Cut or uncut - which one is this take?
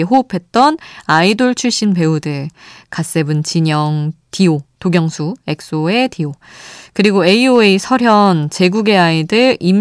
uncut